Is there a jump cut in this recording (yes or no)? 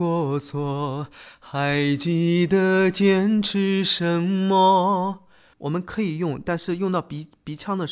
no